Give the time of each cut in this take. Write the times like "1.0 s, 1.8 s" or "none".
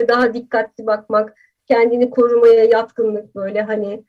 none